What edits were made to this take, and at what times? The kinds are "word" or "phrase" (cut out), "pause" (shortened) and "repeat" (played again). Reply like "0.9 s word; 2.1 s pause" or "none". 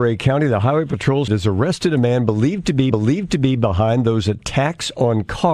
1.3 s phrase; 2.9 s repeat